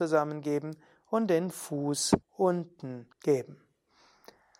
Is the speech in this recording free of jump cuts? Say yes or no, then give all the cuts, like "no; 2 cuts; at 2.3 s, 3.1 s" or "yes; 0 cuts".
no; 2 cuts; at 2.2 s, 3.1 s